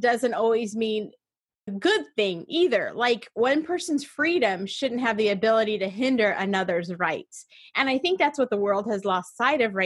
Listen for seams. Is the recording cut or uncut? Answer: cut